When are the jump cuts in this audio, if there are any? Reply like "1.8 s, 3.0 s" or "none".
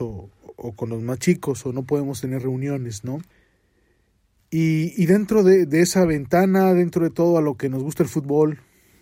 none